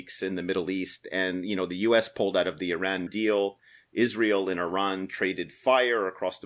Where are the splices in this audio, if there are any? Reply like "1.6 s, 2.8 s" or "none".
3.1 s